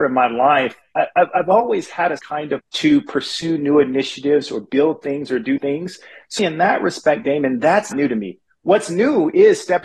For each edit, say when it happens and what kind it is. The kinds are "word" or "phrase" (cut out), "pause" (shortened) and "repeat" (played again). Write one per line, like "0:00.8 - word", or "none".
0:02.2 - word
0:02.6 - word
0:05.6 - word
0:06.4 - word
0:07.9 - word